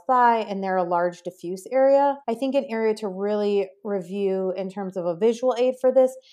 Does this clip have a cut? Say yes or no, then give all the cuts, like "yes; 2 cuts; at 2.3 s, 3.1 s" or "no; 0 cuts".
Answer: yes; 1 cut; at 2.2 s